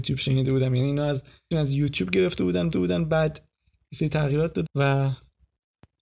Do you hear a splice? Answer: yes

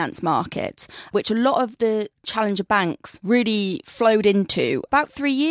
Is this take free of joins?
yes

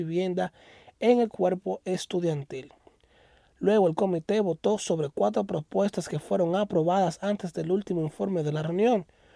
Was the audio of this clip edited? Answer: no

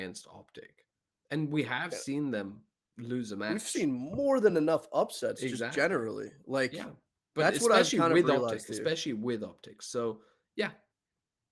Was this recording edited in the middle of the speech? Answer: no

